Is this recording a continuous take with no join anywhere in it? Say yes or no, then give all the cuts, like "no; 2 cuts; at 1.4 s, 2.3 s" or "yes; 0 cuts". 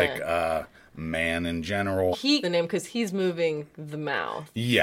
no; 2 cuts; at 2.1 s, 2.4 s